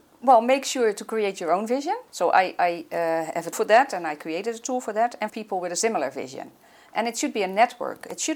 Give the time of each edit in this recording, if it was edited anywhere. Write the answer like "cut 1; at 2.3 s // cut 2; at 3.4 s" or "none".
cut 1; at 2.1 s // cut 2; at 3.5 s // cut 3; at 5.3 s

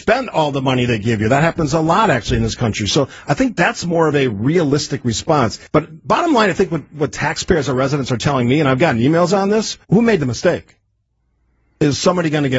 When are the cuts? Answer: cut 1; at 5.7 s // cut 2; at 9.8 s

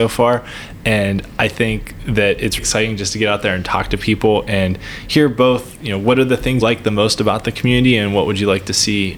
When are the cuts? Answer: cut 1; at 2.6 s // cut 2; at 6.6 s

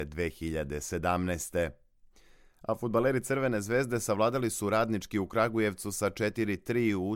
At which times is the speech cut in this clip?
none

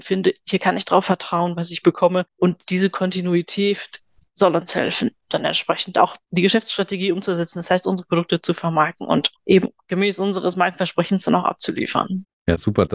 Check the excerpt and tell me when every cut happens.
none

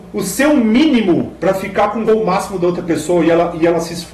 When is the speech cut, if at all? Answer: cut 1; at 2.1 s

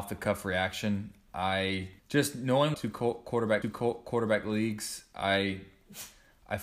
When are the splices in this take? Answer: cut 1; at 2.0 s // cut 2; at 2.7 s // cut 3; at 3.6 s

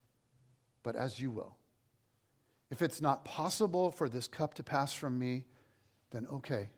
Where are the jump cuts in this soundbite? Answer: none

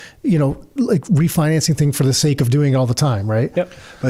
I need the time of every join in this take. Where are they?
none

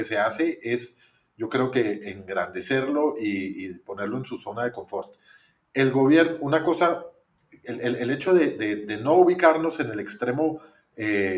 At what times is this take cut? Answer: none

